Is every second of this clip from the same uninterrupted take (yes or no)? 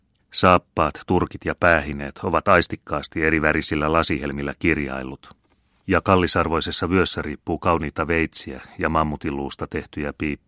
yes